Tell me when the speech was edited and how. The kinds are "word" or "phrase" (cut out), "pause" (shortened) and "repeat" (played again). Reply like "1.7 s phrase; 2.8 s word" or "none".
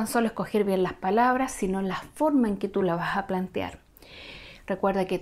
none

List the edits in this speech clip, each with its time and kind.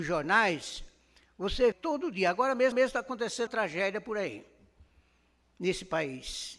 1.7 s phrase; 2.7 s repeat; 3.5 s word

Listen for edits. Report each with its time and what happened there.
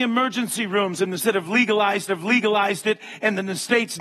1.2 s word; 2.1 s repeat

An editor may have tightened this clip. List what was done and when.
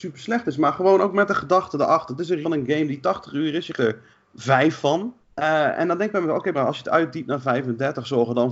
2.4 s word; 3.8 s word; 4.1 s pause; 5.2 s pause; 6.5 s word

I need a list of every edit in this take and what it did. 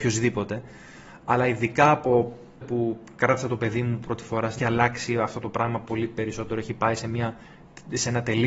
2.6 s word; 4.6 s phrase

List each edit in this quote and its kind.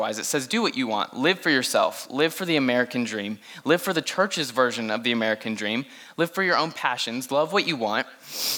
none

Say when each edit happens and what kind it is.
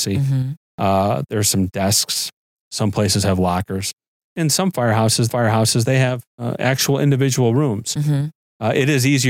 5.3 s repeat; 6.3 s pause

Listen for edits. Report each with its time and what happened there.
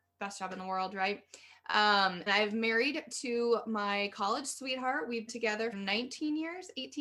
2.3 s word; 5.3 s word; 5.7 s word

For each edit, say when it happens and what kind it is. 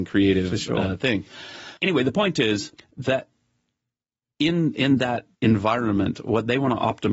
1.8 s pause; 2.8 s pause; 5.3 s pause

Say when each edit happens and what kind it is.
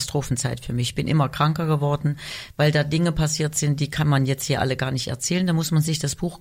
none

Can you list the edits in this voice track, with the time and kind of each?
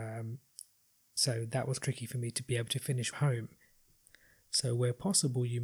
1.8 s word; 3.1 s phrase

